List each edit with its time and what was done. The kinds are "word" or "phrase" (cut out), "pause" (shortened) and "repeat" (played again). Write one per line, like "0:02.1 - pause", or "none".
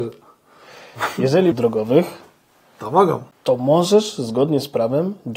0:01.5 - phrase
0:03.3 - pause